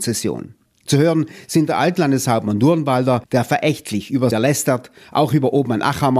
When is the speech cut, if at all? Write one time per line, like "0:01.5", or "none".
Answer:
0:03.2
0:04.3